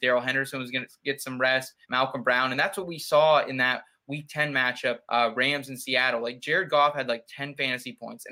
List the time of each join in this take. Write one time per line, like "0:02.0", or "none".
0:01.8
0:05.0

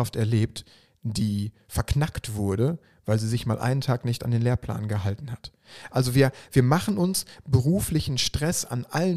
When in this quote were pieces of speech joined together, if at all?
none

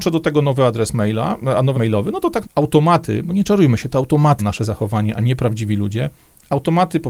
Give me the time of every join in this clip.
0:01.7
0:02.4
0:04.4

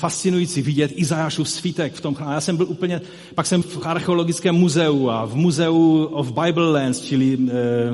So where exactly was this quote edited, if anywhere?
0:03.6

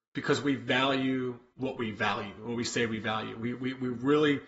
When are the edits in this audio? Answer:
none

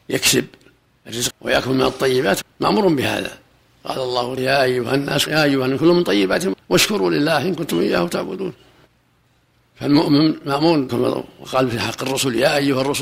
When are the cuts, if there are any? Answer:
0:01.3
0:02.4
0:04.4
0:05.3
0:06.5
0:10.9

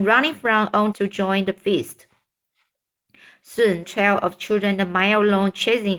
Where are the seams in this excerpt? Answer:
0:00.9
0:03.8

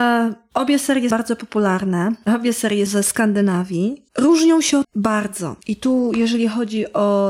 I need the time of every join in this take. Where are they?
0:01.1
0:02.9
0:04.1
0:04.8
0:05.6

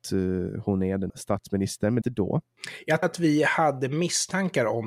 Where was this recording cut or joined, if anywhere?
0:01.1
0:02.0
0:03.0

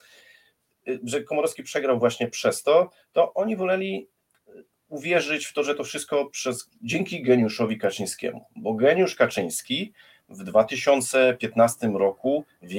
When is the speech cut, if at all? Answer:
none

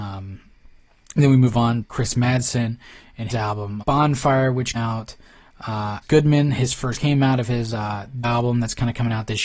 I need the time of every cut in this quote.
0:01.8
0:03.3
0:03.8
0:04.8
0:06.0
0:07.0
0:08.2

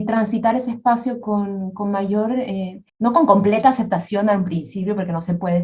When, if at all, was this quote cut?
0:02.9

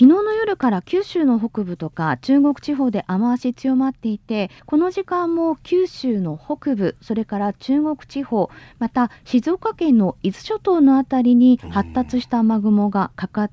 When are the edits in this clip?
0:04.6

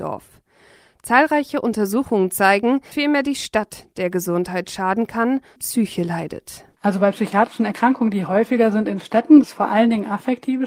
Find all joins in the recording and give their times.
0:02.9
0:05.6
0:09.4

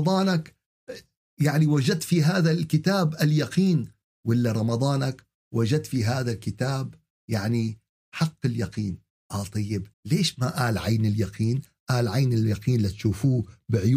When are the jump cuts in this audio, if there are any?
0:09.9

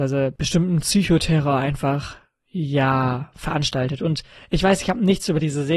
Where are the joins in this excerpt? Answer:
none

